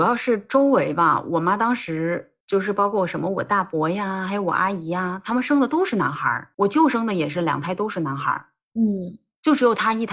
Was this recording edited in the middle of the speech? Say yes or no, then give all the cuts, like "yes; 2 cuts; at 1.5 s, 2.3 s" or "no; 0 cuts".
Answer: yes; 2 cuts; at 2.4 s, 6.5 s